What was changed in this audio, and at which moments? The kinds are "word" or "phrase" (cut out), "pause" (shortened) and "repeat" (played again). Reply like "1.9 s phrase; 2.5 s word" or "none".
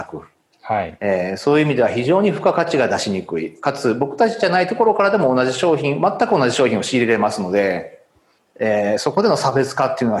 8.4 s pause